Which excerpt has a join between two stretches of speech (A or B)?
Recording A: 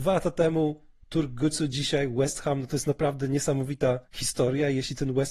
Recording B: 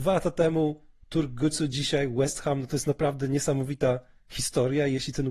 A